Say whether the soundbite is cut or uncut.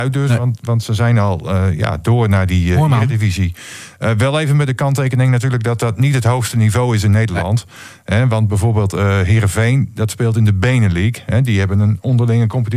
uncut